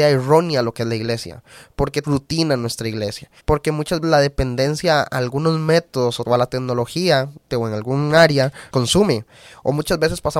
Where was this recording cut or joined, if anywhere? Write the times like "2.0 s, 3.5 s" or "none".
2.0 s, 3.4 s, 4.0 s, 6.2 s, 7.5 s, 8.7 s